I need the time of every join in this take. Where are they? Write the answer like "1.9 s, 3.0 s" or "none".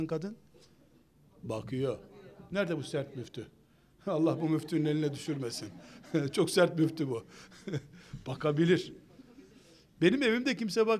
none